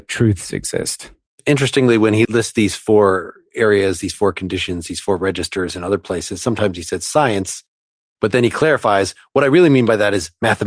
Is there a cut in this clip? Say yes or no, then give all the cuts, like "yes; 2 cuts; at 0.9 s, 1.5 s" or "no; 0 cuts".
no; 0 cuts